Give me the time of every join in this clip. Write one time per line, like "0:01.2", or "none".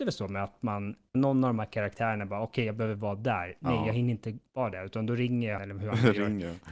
0:01.1
0:05.6